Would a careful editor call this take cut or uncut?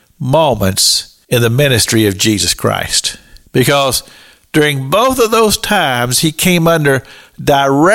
cut